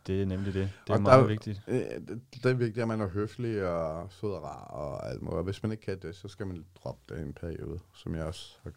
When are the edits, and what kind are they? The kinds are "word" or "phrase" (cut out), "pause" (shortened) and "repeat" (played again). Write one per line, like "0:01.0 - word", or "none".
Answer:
none